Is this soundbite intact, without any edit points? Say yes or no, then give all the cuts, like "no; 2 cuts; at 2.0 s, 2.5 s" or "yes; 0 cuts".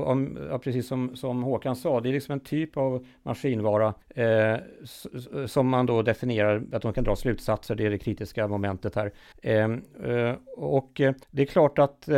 no; 3 cuts; at 4.0 s, 9.3 s, 11.2 s